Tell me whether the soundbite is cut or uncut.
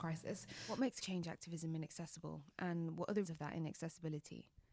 cut